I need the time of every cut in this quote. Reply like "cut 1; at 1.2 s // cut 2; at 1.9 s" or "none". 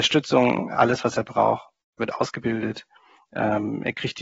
none